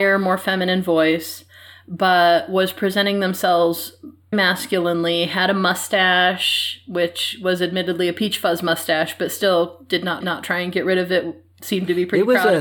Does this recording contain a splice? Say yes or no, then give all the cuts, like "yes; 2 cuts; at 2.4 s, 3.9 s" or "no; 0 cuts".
yes; 2 cuts; at 4.3 s, 10.2 s